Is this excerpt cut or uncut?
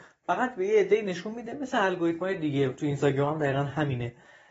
uncut